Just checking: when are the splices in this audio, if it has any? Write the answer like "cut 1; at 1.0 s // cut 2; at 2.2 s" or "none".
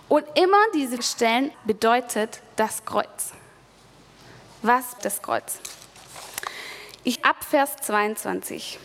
cut 1; at 1.0 s // cut 2; at 1.5 s // cut 3; at 5.0 s // cut 4; at 7.2 s